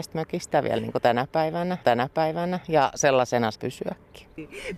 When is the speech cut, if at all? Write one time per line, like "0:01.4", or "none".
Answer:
0:01.8
0:03.6